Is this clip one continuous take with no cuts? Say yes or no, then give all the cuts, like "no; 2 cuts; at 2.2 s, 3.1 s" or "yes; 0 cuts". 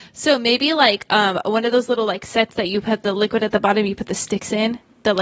yes; 0 cuts